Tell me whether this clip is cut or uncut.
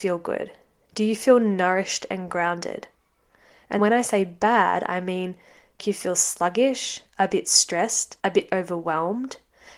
cut